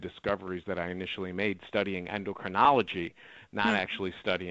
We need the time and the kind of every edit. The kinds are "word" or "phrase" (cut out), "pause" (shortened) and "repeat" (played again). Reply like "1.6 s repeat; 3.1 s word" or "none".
none